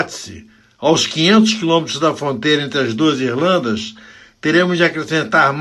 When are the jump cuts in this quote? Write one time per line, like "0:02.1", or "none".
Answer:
none

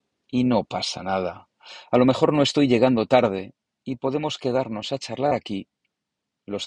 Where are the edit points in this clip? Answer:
none

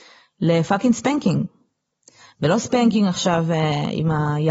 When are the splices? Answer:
none

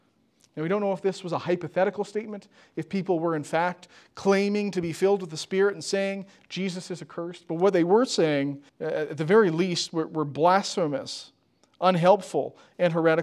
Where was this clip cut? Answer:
0:08.7

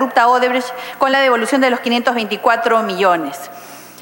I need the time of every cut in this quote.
none

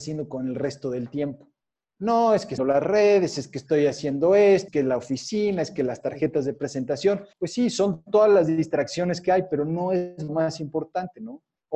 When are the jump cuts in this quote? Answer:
0:01.7
0:02.6
0:04.7
0:07.3

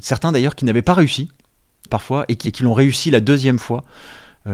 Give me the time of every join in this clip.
0:01.9
0:02.4

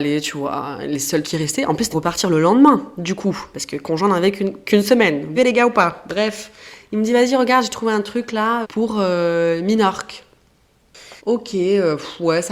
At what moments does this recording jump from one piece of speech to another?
0:01.2
0:01.9
0:05.4
0:08.6
0:11.2

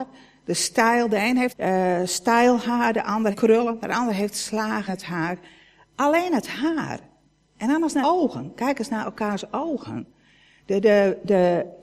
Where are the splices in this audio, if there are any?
0:01.5
0:03.3
0:04.9
0:08.0

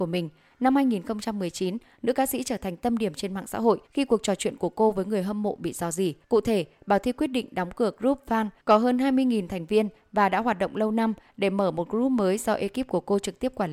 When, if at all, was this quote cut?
0:03.9
0:06.2
0:08.6

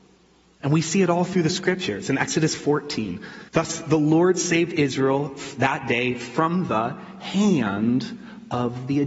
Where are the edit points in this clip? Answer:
0:03.5

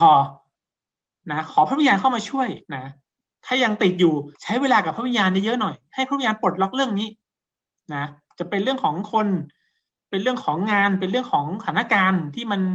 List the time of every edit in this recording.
0:02.6
0:04.3

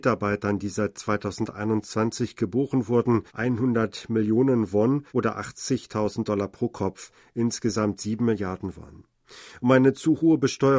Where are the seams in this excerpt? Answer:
0:03.3
0:05.1

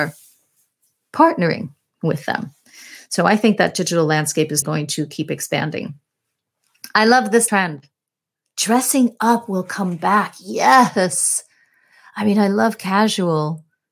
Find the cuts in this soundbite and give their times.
0:04.6
0:07.5

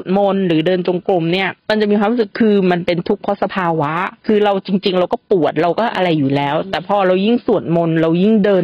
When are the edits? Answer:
0:01.6
0:04.2

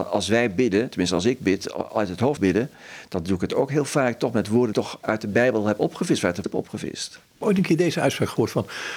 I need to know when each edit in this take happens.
0:02.4
0:04.7
0:06.4

